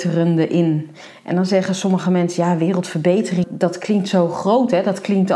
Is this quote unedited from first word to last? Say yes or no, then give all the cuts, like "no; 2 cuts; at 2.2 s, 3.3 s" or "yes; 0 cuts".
no; 1 cut; at 3.4 s